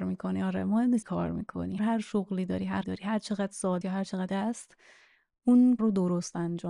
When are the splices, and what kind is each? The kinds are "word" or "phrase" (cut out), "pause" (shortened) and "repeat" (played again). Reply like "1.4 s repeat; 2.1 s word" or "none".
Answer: 1.0 s word; 1.8 s word; 2.8 s word; 3.8 s word; 4.3 s word; 5.8 s word

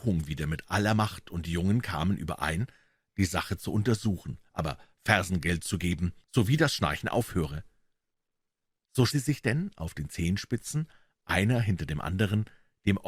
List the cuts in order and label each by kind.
6.2 s pause; 9.1 s word

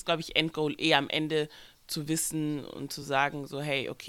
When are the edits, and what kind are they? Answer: none

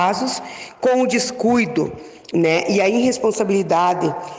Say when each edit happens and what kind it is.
none

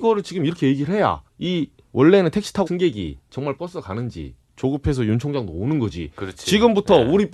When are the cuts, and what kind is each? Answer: 1.3 s pause; 2.7 s word; 3.6 s word

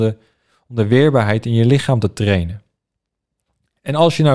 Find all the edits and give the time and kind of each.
none

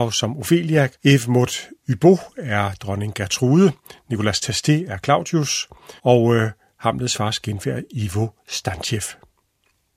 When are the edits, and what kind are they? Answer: 0.9 s pause; 6.0 s pause

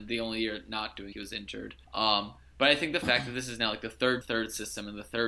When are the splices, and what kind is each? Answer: 1.1 s word; 1.8 s pause; 4.2 s phrase

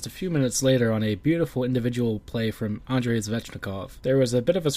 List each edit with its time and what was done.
none

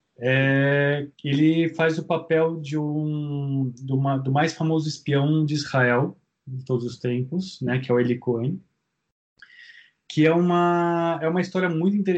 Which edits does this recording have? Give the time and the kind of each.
1.1 s pause

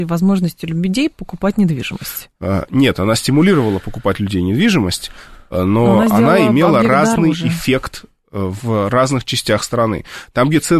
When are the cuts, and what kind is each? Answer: none

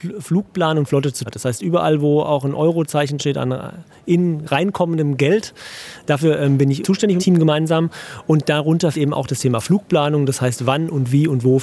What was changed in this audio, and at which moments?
1.3 s word; 3.2 s word; 6.8 s word; 7.2 s word; 8.9 s word

